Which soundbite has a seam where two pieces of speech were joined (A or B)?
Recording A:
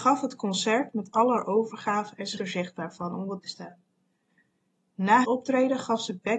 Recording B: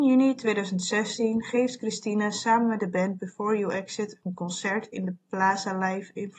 A